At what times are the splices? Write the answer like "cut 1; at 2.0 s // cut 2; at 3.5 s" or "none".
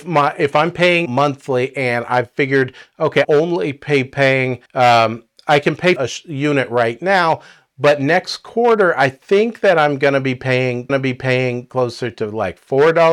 cut 1; at 1.1 s // cut 2; at 3.2 s // cut 3; at 4.7 s // cut 4; at 6.0 s // cut 5; at 10.9 s